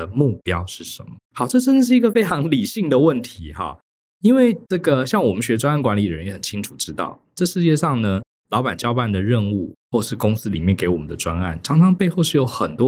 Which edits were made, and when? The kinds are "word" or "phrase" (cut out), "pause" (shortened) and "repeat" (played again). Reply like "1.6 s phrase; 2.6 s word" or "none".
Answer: 1.2 s pause; 4.6 s pause